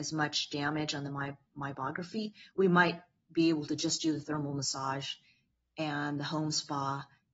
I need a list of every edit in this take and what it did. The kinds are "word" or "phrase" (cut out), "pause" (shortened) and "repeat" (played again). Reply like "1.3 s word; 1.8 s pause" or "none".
none